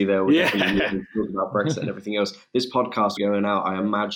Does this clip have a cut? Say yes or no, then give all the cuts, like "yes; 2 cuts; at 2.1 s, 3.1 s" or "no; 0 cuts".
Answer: yes; 1 cut; at 3.2 s